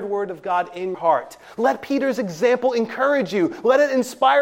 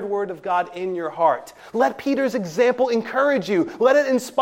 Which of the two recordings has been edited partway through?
first; 1 cut; at 0.9 s

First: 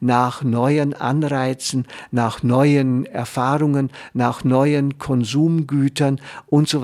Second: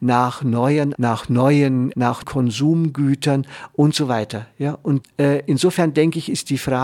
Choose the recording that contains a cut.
second; 4 cuts; at 0.9 s, 1.9 s, 2.2 s, 5.0 s

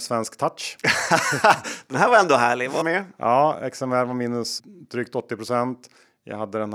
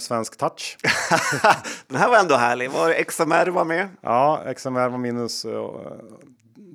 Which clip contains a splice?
first; 2 cuts; at 2.8 s, 4.6 s

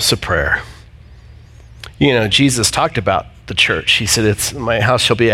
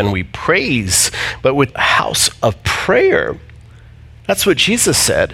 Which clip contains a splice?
second; 1 cut; at 1.7 s

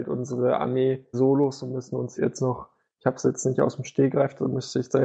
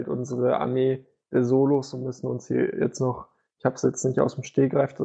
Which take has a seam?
first; 2 cuts; at 1.1 s, 2.2 s

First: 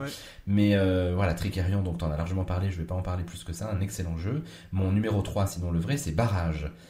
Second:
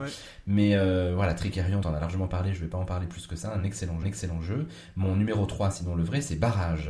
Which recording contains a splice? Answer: second; 2 cuts; at 1.8 s, 4.0 s

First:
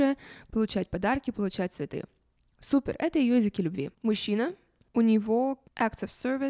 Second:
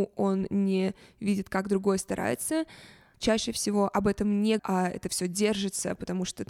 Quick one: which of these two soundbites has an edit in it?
second; 1 cut; at 4.6 s

